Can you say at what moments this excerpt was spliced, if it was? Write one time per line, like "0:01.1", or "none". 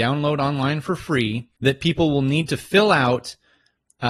0:01.6